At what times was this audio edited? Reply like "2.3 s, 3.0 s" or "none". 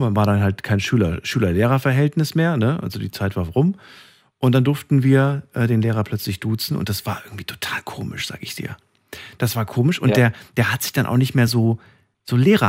none

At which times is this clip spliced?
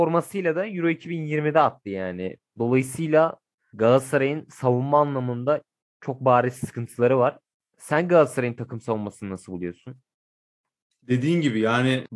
none

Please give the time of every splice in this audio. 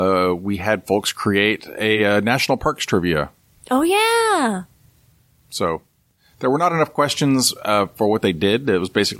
none

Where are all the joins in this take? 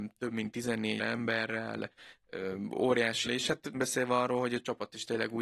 1.0 s, 3.2 s, 3.7 s

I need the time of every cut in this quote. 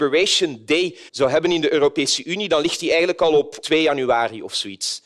1.1 s, 3.6 s

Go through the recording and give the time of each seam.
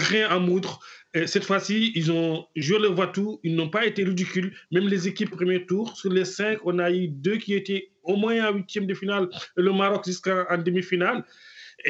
5.3 s

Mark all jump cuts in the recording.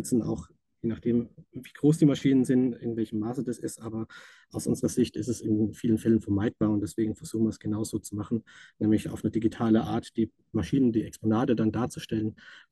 none

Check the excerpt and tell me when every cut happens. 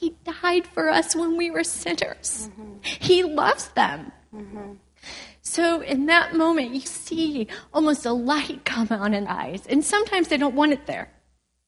1.6 s, 6.9 s, 9.3 s

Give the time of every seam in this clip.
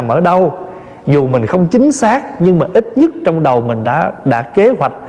none

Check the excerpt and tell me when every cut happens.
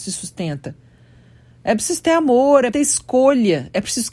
2.7 s

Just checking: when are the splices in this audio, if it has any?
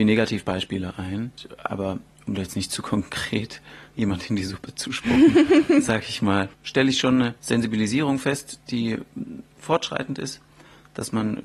6.5 s, 7.4 s

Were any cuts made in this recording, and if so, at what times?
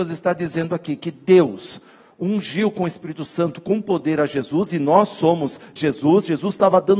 5.8 s

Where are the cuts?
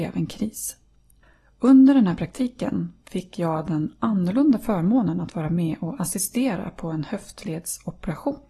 1.2 s

